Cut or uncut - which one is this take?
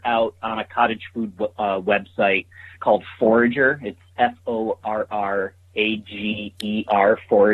cut